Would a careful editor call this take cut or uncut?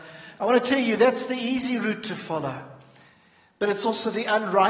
uncut